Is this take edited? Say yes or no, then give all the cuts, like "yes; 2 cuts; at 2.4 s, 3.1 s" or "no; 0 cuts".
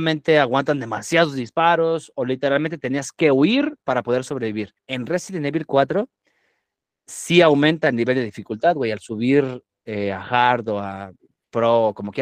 yes; 1 cut; at 4.8 s